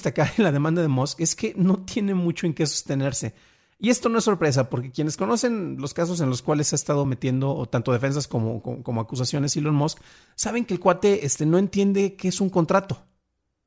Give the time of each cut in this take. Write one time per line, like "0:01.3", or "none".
none